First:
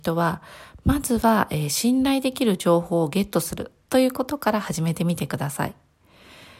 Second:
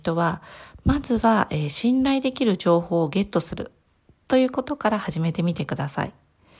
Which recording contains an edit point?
first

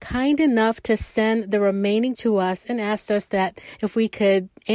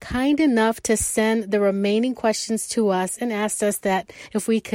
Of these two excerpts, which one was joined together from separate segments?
first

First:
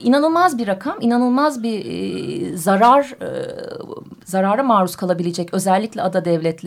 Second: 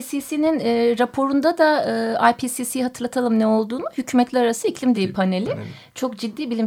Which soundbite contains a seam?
second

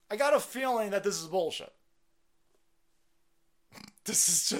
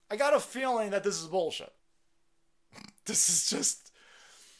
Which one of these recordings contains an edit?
second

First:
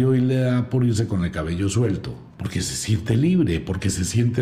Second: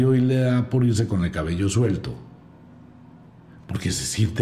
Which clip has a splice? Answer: first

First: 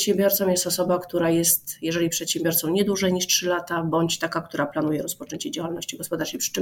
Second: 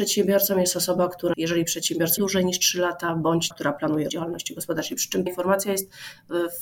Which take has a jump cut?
second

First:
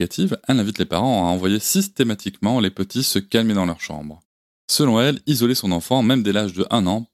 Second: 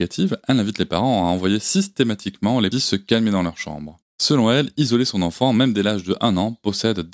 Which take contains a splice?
second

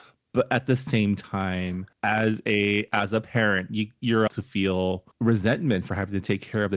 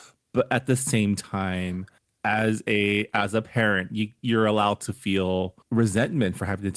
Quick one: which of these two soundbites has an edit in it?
first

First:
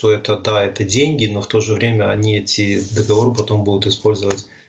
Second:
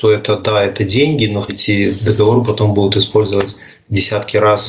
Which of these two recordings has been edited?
second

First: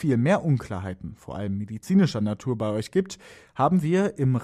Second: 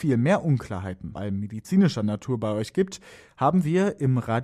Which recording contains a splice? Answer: second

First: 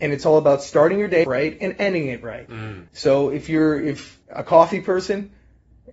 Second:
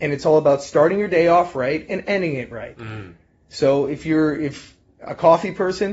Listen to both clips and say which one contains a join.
first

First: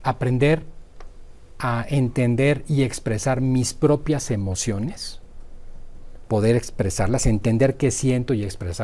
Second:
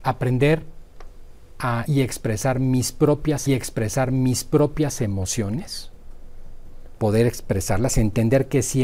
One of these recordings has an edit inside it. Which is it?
second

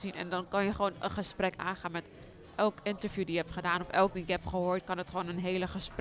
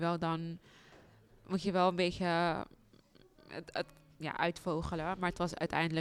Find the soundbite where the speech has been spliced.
first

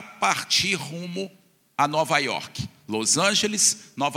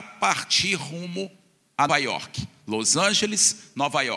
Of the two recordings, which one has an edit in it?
second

